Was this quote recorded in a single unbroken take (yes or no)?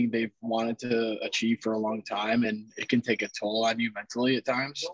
yes